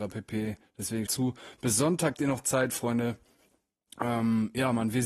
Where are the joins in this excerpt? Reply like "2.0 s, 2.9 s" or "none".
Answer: 1.1 s, 2.1 s